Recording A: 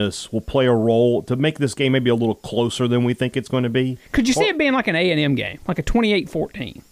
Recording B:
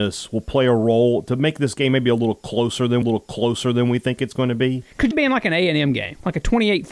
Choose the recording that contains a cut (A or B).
B